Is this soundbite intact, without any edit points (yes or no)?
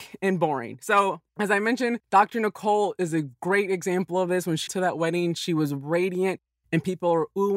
no